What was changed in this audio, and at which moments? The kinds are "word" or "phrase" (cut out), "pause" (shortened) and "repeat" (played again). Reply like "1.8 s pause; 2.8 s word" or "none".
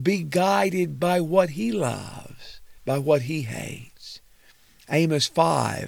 2.8 s pause